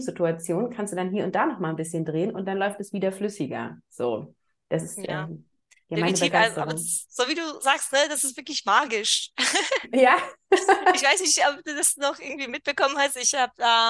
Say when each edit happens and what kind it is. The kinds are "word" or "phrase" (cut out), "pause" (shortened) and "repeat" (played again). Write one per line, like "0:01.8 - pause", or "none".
none